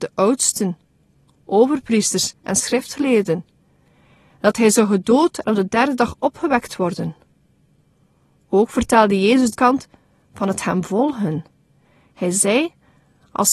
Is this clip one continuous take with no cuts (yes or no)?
no